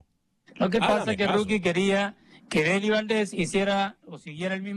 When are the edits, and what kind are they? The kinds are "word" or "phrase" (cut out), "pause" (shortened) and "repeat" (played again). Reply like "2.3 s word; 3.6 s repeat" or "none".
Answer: none

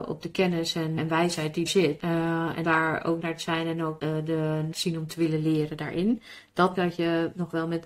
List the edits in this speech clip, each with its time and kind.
1.0 s word; 1.7 s word; 2.6 s word; 3.2 s word; 4.7 s word; 6.7 s word

